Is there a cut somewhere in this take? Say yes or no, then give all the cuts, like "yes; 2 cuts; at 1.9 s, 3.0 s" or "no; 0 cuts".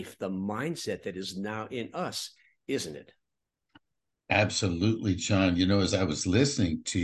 no; 0 cuts